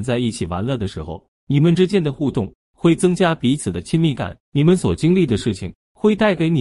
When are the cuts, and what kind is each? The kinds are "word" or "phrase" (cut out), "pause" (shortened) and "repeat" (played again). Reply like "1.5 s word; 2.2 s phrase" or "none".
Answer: 4.4 s pause